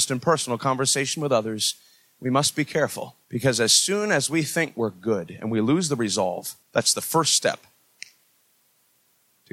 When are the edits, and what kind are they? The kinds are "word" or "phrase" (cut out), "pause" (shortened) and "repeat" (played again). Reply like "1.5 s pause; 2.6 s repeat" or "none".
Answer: 3.2 s pause; 6.6 s pause